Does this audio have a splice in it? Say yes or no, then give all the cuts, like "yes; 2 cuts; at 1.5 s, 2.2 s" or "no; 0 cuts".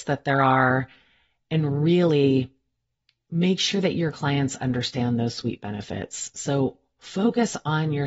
no; 0 cuts